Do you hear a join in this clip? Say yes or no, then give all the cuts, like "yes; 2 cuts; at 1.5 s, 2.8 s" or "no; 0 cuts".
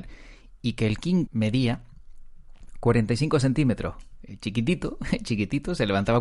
yes; 1 cut; at 1.3 s